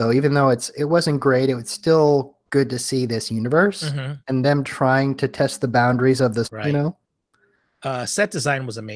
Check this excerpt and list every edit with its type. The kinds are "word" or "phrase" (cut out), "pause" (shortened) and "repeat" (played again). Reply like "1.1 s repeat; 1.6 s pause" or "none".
2.4 s pause; 4.2 s pause; 6.4 s word